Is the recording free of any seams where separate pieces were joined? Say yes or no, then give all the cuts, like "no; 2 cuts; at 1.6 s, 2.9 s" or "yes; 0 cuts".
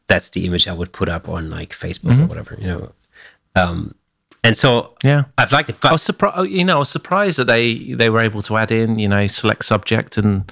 yes; 0 cuts